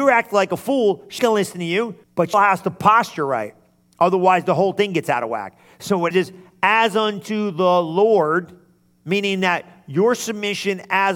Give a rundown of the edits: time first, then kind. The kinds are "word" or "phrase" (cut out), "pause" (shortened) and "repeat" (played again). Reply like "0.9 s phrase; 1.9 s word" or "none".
1.2 s word; 2.0 s pause; 2.3 s word; 6.1 s word